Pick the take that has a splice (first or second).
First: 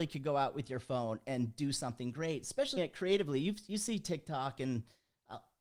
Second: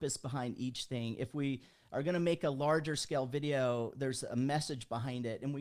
first